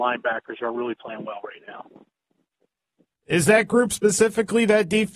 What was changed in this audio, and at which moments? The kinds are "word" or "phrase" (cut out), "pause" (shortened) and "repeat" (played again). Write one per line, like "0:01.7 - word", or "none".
none